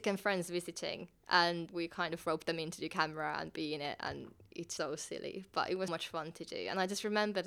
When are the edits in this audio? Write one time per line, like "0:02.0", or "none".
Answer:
0:01.7
0:04.8
0:05.9